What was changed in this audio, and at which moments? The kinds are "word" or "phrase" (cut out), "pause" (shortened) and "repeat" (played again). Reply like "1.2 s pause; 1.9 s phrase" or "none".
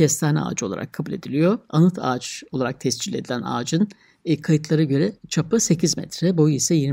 5.2 s pause